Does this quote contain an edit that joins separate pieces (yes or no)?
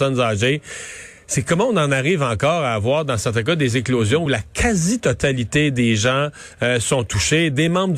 no